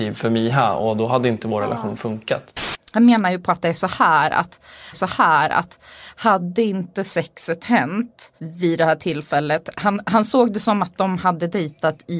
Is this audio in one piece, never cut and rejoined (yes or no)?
no